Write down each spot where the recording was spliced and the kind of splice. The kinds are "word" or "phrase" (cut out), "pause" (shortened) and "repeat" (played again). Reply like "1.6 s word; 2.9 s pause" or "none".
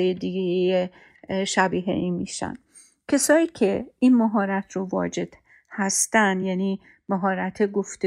none